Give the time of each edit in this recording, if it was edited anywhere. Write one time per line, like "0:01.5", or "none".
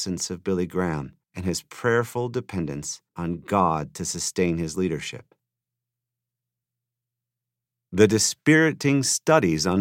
0:01.2
0:03.1